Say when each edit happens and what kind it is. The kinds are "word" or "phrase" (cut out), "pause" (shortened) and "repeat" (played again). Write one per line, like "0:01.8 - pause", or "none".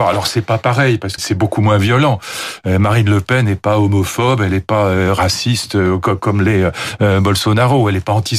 0:01.2 - word